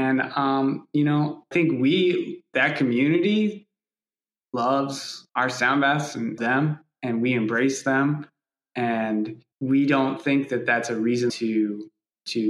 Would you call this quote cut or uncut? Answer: cut